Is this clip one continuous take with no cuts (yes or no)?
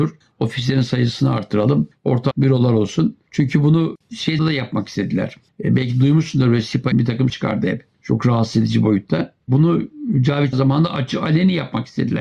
no